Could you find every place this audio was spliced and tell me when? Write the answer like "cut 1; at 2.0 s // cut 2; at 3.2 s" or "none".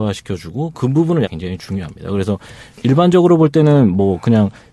cut 1; at 1.2 s // cut 2; at 2.7 s